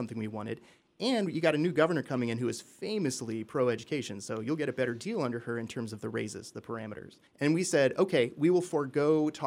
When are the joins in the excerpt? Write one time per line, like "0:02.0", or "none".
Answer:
0:07.3